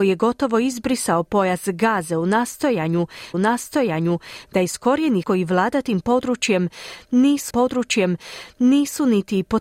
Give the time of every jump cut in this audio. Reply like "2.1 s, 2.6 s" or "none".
3.3 s, 5.2 s, 7.5 s